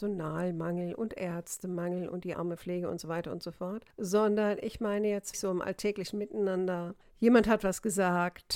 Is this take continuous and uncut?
no; 2 cuts; at 2.3 s, 5.3 s

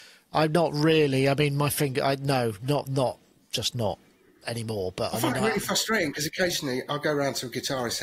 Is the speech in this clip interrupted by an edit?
no; 0 cuts

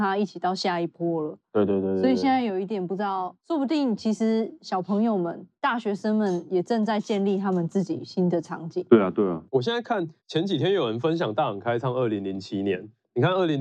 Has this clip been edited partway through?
yes; 4 cuts; at 3.4 s, 5.6 s, 8.9 s, 10.2 s

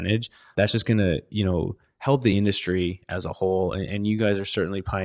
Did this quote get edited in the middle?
no; 0 cuts

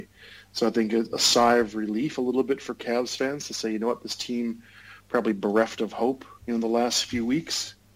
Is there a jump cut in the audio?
yes; 1 cut; at 6.4 s

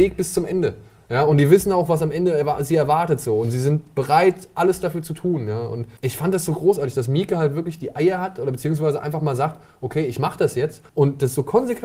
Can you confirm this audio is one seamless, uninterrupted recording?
no; 2 cuts; at 6.0 s, 10.9 s

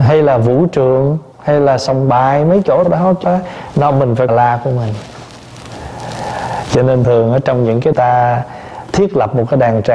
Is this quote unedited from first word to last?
no; 6 cuts; at 1.3 s, 2.8 s, 3.2 s, 4.3 s, 7.0 s, 7.9 s

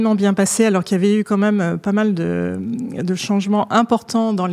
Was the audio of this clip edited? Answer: no; 0 cuts

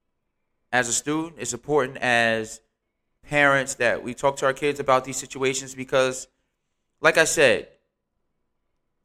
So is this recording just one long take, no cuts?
yes; 0 cuts

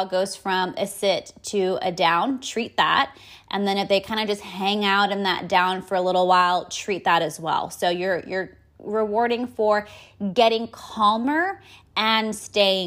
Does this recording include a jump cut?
no; 0 cuts

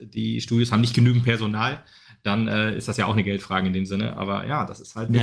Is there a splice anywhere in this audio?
no; 0 cuts

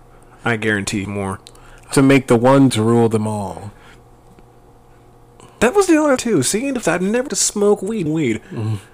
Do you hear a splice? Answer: yes; 7 cuts; at 1.0 s, 1.9 s, 2.7 s, 6.2 s, 6.8 s, 7.3 s, 8.1 s

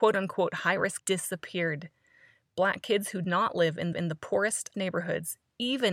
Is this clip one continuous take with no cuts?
no; 4 cuts; at 1.0 s, 3.2 s, 3.9 s, 4.7 s

